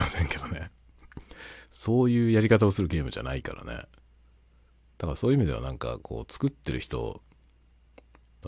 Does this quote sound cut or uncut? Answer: uncut